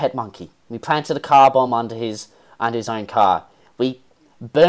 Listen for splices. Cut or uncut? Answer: uncut